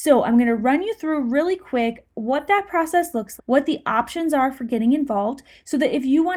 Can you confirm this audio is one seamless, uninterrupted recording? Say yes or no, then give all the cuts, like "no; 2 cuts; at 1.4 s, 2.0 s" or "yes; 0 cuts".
no; 1 cut; at 3.4 s